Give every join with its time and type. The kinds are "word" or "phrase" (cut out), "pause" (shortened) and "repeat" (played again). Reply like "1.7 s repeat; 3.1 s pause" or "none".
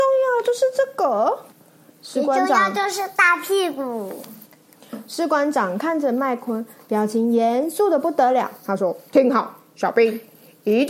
1.5 s pause; 4.4 s pause